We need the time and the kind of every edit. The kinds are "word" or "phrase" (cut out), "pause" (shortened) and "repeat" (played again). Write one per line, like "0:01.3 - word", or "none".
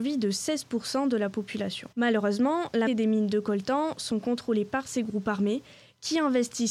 0:01.9 - pause
0:02.9 - word